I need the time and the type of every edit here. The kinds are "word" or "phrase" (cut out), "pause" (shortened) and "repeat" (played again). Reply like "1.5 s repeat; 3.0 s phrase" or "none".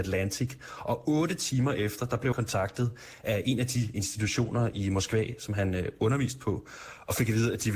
2.3 s word; 3.9 s word